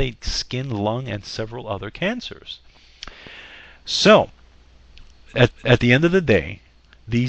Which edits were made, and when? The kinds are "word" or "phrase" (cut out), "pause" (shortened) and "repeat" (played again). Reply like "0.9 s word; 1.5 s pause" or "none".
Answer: 5.5 s repeat